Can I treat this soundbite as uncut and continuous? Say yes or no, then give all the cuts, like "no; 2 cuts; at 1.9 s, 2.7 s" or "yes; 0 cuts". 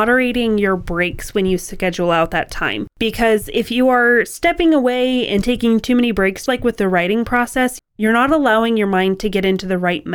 no; 2 cuts; at 2.9 s, 6.5 s